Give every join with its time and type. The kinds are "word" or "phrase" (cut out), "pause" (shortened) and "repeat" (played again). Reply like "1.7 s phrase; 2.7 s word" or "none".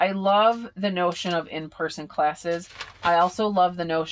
none